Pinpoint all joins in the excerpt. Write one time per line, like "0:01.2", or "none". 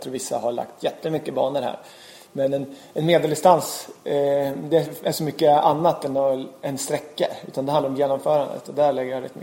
none

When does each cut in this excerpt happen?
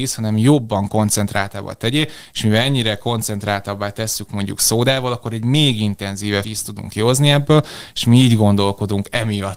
0:04.3
0:06.4

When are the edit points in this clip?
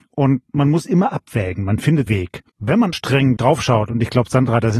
0:02.1
0:02.5
0:02.9
0:03.4

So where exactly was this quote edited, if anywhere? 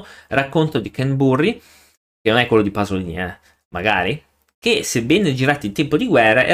none

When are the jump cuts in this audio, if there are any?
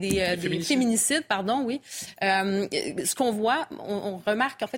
none

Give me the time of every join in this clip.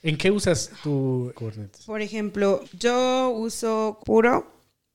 0:01.3
0:02.6
0:04.0

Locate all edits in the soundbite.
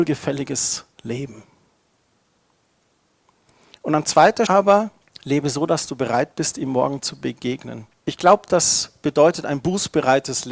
0:00.9
0:04.5
0:05.0
0:07.9

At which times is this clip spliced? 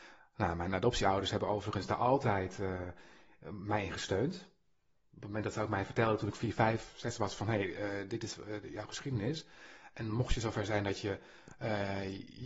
none

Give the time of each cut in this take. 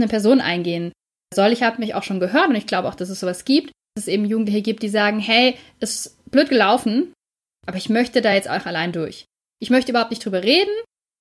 none

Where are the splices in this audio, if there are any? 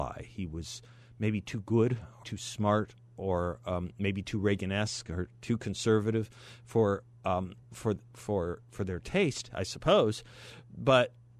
0:02.2
0:07.6

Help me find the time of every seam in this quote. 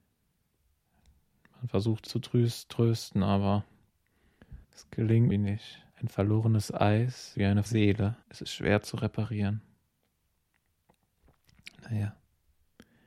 0:02.1
0:04.6
0:05.3
0:05.9
0:07.3
0:07.7
0:08.2

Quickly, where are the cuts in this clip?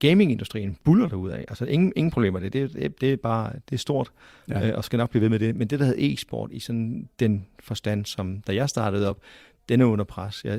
none

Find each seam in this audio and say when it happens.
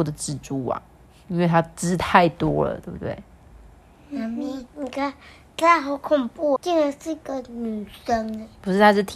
0:06.6

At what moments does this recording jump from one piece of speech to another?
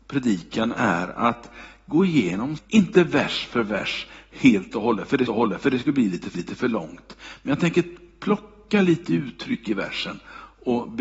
0:02.6
0:05.3
0:06.4

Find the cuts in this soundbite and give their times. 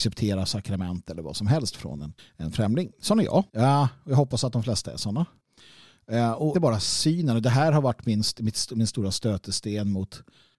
0:02.2
0:03.5
0:06.5

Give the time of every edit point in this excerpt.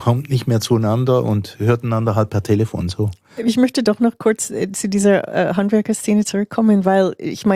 none

